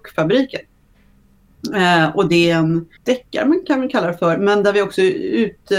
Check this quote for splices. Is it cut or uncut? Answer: cut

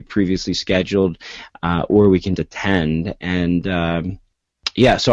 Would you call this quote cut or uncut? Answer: cut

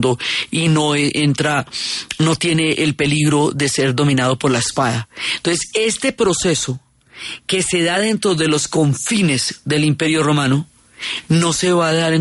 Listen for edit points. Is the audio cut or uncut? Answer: uncut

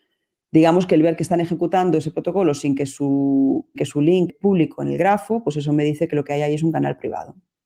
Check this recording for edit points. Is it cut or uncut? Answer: cut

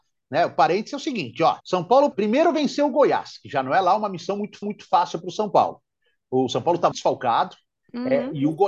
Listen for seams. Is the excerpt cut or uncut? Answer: cut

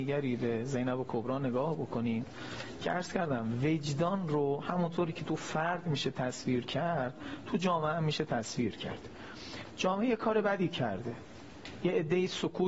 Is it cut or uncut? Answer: uncut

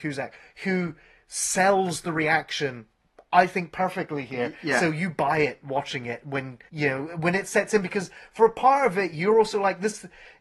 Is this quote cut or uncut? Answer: cut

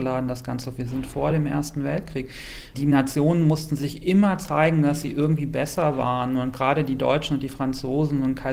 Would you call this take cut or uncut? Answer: uncut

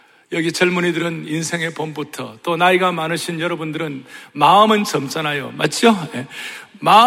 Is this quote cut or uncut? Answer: uncut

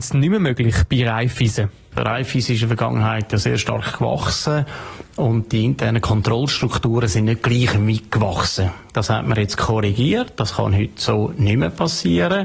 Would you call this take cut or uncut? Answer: uncut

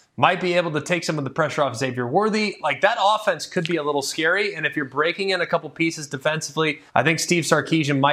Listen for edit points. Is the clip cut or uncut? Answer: cut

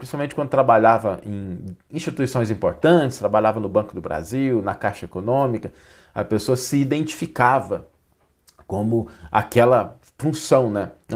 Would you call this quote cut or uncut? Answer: uncut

